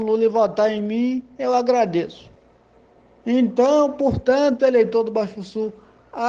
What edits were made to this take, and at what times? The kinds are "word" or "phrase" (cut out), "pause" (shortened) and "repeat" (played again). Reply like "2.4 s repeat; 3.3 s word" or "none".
none